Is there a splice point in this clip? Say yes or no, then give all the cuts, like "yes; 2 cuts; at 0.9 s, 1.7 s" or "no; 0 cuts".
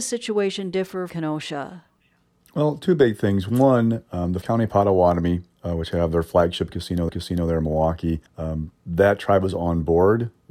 yes; 4 cuts; at 1.1 s, 4.4 s, 7.1 s, 8.3 s